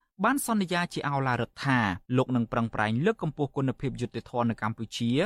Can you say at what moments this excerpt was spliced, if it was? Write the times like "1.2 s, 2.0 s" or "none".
2.1 s